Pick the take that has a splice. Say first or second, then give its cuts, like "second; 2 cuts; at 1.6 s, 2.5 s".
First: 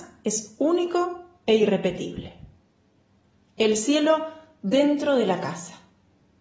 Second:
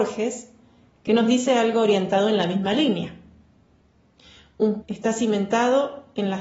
second; 1 cut; at 4.8 s